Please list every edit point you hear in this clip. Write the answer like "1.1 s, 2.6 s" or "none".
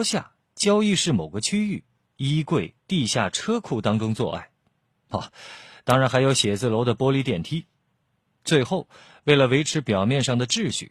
none